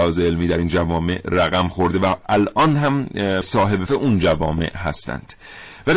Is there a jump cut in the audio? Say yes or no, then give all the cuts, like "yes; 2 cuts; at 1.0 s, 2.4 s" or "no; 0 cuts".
yes; 2 cuts; at 3.4 s, 3.9 s